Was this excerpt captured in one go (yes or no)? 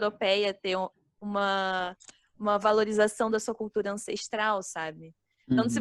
yes